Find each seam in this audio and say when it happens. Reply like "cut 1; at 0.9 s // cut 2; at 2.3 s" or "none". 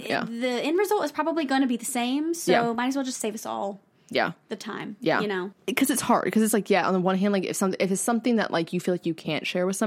none